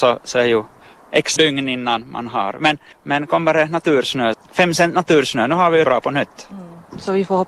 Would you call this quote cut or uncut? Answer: cut